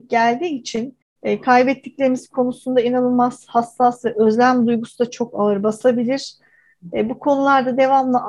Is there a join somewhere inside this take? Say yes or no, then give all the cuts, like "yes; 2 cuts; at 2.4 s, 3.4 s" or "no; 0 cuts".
no; 0 cuts